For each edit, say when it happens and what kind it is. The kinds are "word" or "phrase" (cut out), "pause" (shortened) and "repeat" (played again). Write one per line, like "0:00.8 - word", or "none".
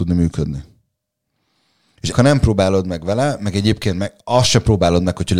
0:02.1 - phrase